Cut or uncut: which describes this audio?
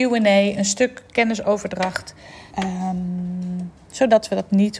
cut